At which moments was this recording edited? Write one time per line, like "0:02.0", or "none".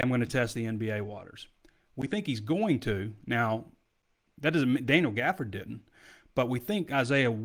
none